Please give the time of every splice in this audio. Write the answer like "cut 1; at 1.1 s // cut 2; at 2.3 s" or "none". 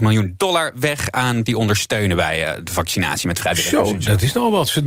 cut 1; at 1.5 s